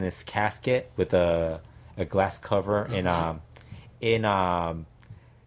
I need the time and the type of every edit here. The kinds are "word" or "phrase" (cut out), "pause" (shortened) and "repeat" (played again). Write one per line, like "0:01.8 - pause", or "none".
none